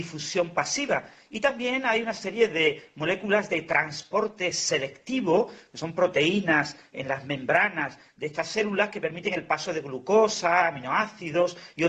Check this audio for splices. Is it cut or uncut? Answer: uncut